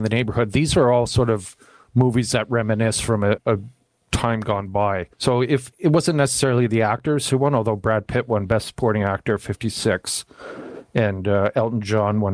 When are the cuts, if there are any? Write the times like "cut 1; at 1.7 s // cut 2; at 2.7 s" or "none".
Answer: cut 1; at 3.4 s // cut 2; at 5.1 s // cut 3; at 5.7 s